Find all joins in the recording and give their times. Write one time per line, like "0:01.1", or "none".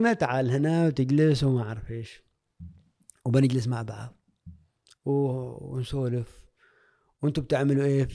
none

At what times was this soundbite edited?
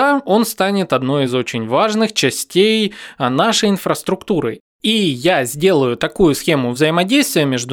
none

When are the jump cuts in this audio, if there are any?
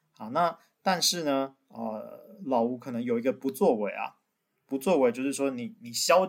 none

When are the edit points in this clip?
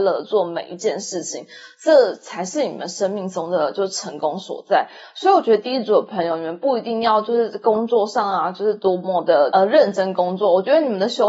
none

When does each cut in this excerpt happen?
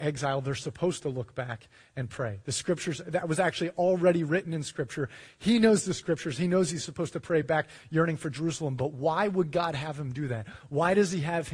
none

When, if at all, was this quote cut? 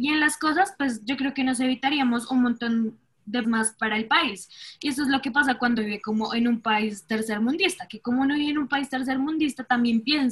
0:03.4
0:05.8

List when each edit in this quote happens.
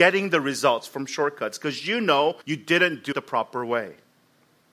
0:02.4
0:03.1

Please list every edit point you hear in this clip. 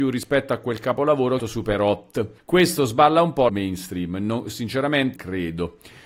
0:01.4
0:02.4
0:03.5
0:05.2

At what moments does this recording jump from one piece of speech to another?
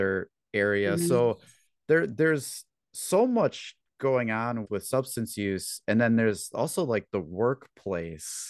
0:04.6

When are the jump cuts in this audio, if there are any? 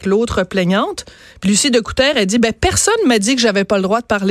0:01.2

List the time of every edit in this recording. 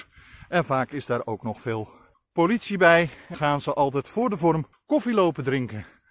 0:02.1
0:03.3
0:04.7

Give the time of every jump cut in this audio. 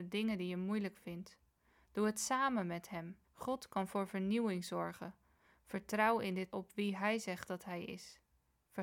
0:03.2
0:06.5

